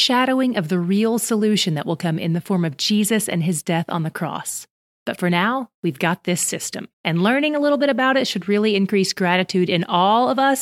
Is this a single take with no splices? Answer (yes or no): no